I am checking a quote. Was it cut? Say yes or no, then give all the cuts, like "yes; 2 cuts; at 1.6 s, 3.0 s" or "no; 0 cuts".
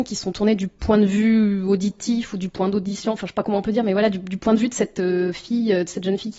no; 0 cuts